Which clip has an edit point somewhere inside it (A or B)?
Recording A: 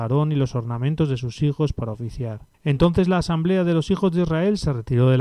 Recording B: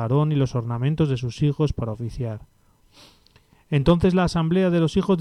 A